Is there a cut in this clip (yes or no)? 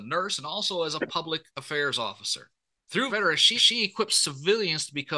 yes